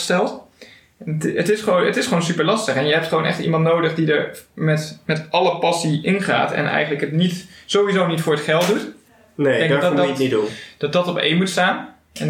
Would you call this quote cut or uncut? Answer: uncut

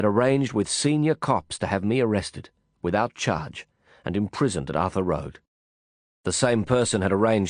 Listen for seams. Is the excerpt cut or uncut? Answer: uncut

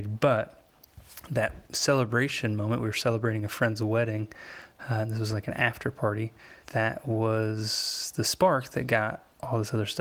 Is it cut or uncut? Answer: cut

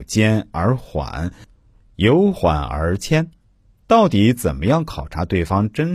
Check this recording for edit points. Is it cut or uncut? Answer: cut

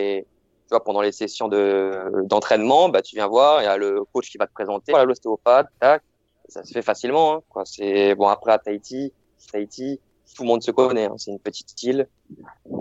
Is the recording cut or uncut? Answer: cut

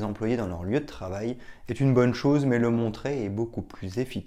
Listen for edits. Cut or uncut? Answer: uncut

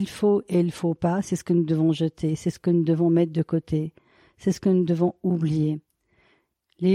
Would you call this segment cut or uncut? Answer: uncut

